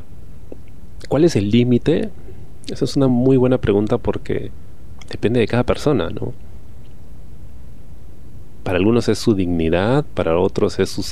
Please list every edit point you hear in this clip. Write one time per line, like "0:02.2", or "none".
none